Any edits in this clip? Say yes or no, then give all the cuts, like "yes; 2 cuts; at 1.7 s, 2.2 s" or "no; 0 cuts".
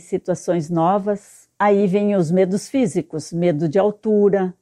yes; 1 cut; at 1.5 s